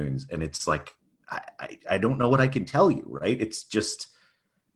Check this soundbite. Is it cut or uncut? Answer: uncut